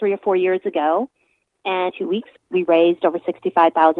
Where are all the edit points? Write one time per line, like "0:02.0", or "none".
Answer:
0:01.9
0:02.4